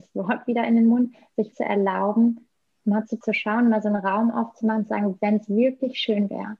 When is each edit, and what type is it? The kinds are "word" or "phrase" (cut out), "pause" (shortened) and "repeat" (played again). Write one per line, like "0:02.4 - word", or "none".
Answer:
0:01.5 - word
0:03.2 - phrase